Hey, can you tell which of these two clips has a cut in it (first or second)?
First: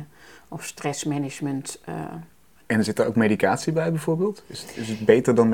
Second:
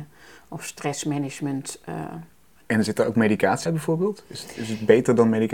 second